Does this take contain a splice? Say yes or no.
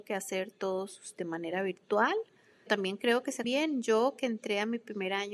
yes